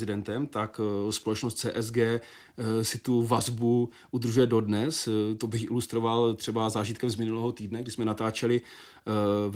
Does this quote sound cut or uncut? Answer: uncut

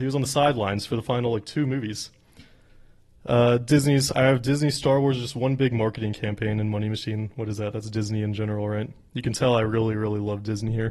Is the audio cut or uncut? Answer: uncut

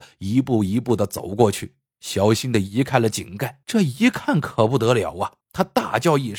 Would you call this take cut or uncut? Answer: cut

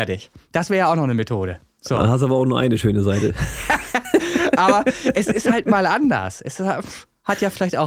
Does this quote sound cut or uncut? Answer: uncut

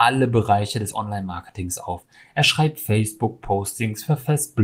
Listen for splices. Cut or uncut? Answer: uncut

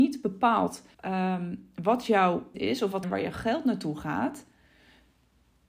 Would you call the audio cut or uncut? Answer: cut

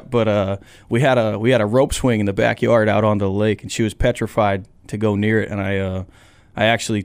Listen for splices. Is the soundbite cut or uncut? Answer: uncut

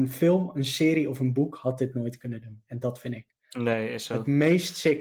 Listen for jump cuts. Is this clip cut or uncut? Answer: uncut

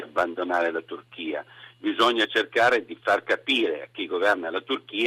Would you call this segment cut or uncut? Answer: uncut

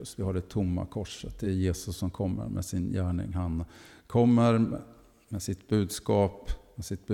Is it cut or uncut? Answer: uncut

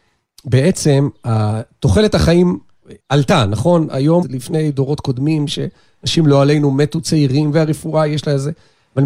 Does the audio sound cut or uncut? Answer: cut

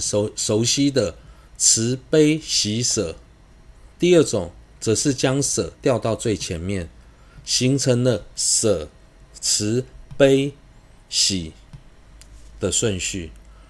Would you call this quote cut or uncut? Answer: cut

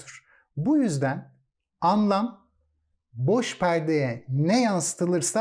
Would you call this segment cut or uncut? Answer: uncut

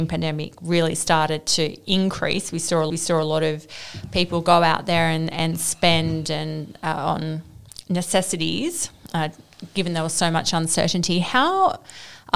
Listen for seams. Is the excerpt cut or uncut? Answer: cut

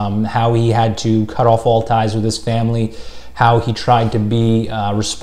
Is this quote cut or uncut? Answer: uncut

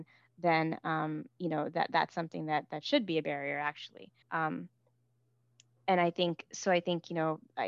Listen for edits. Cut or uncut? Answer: cut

